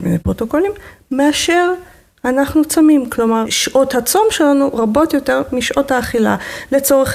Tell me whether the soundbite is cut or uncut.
uncut